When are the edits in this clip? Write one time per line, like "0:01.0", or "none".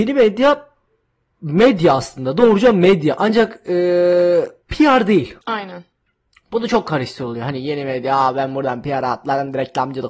0:04.6
0:05.4

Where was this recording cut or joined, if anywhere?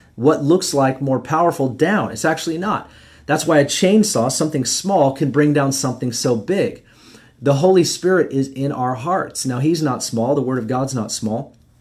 none

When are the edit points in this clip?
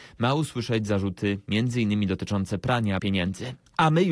0:03.0

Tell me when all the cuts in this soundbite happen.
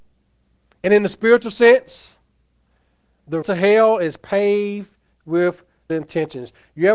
0:03.4
0:05.9

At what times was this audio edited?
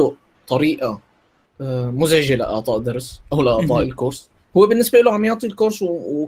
0:03.3

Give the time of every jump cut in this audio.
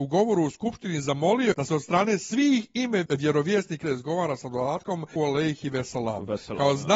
0:01.5
0:03.1
0:03.8
0:05.2

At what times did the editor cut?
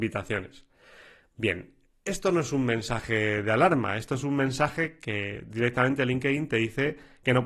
none

